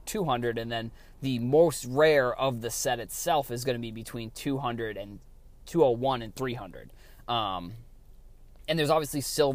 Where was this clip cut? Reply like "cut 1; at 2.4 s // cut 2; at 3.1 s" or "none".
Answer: none